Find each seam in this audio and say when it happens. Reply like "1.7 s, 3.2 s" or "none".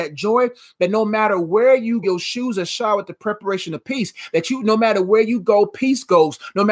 2.0 s